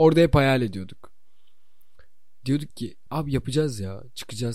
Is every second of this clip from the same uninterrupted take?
yes; 0 cuts

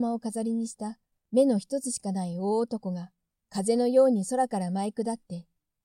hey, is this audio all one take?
yes; 0 cuts

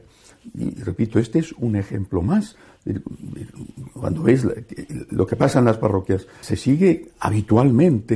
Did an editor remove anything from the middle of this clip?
yes; 1 cut; at 6.4 s

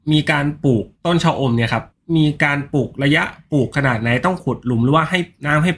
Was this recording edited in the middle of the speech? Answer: yes; 2 cuts; at 0.9 s, 1.9 s

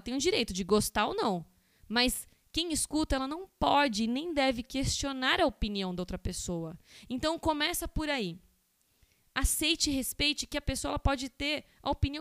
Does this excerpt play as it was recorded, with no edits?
yes; 0 cuts

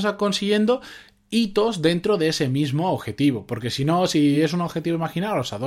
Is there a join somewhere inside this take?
no; 0 cuts

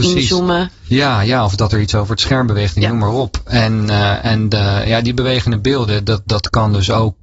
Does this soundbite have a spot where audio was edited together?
no; 0 cuts

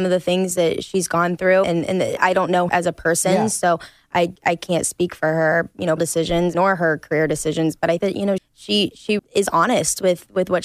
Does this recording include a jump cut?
yes; 9 cuts; at 1.6 s, 2.2 s, 2.7 s, 4.4 s, 6.0 s, 6.5 s, 8.0 s, 8.4 s, 9.2 s

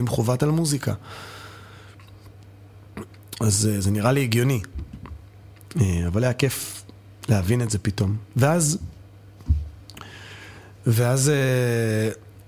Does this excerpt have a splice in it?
no; 0 cuts

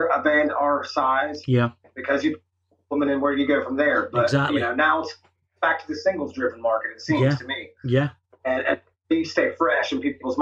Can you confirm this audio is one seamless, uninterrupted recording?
yes; 0 cuts

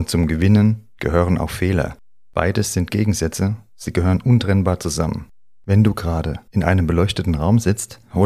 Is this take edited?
yes; 2 cuts; at 2.9 s, 6.5 s

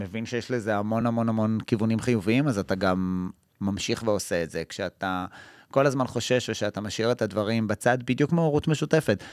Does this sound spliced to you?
no; 0 cuts

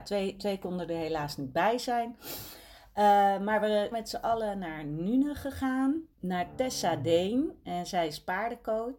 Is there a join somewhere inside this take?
yes; 2 cuts; at 3.9 s, 6.1 s

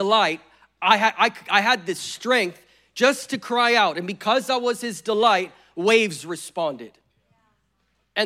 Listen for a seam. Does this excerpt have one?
no; 0 cuts

